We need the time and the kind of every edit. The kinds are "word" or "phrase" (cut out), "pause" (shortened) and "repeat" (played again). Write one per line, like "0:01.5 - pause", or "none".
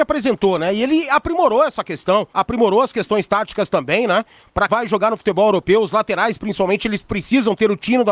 0:02.3 - pause
0:04.7 - word